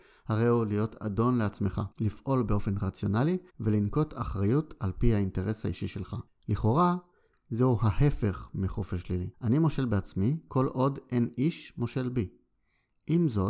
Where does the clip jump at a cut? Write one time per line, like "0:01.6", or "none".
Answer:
0:01.9
0:03.5
0:06.3
0:09.3